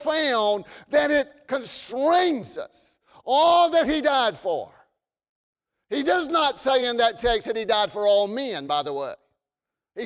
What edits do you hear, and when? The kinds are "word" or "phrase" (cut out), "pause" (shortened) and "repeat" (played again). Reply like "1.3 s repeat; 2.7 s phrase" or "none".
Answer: none